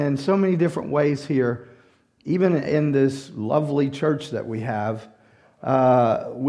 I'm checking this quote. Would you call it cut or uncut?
uncut